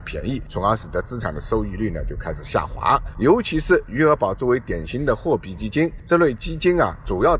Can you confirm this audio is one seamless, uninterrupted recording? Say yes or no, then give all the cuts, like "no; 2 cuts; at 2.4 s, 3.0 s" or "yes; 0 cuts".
yes; 0 cuts